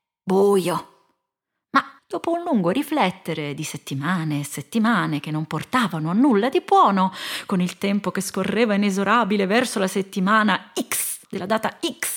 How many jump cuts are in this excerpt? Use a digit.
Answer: 2